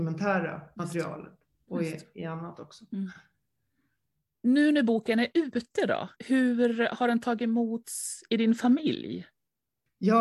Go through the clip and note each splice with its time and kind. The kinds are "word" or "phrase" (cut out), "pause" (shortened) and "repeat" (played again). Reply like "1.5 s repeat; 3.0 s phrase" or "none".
6.1 s pause